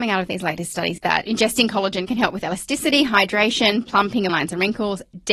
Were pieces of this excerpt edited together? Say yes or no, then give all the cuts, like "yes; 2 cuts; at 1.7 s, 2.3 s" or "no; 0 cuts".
yes; 2 cuts; at 1.0 s, 4.3 s